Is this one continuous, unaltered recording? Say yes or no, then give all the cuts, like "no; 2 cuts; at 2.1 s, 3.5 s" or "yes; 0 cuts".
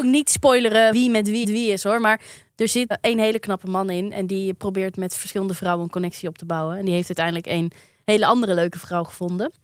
no; 3 cuts; at 0.9 s, 1.4 s, 2.9 s